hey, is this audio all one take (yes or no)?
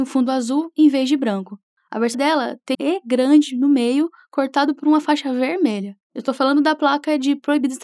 no